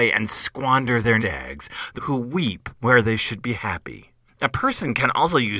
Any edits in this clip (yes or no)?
yes